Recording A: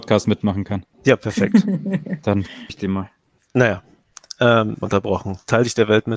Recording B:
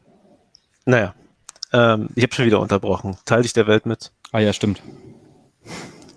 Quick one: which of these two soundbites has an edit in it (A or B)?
A